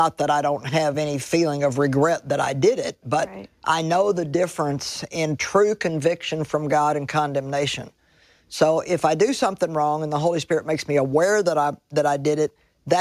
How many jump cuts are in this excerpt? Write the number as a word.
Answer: zero